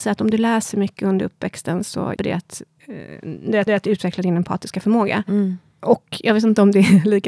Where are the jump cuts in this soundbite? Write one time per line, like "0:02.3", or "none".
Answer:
0:02.2
0:03.7